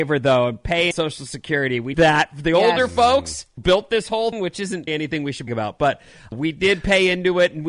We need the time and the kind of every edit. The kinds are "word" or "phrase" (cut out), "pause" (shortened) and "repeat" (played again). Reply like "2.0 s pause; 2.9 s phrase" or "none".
0.9 s word; 1.9 s word; 3.6 s word; 4.3 s word; 4.9 s word; 5.5 s word; 6.3 s word